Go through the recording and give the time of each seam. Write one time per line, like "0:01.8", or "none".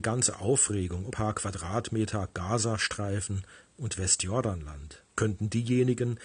0:01.1
0:05.1

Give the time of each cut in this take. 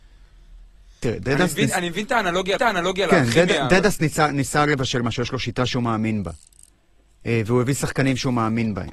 0:02.6

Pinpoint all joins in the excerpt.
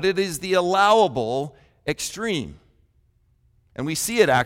none

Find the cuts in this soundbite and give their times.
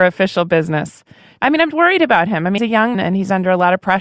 0:01.7
0:02.6
0:02.9

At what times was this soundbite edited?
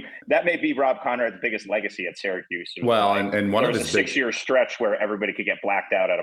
none

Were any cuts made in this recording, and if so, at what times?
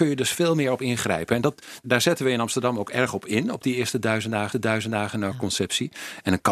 0:01.8
0:04.5

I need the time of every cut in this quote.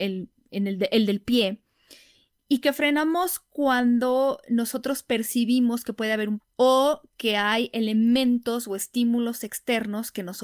0:06.4

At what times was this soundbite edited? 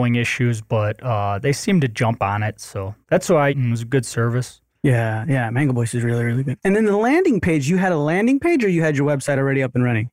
0:03.0
0:03.5

